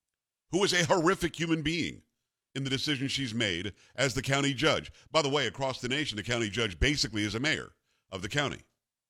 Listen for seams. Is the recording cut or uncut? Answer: uncut